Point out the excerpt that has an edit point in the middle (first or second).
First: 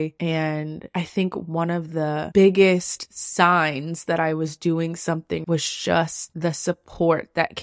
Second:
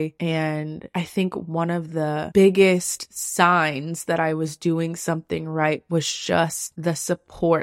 first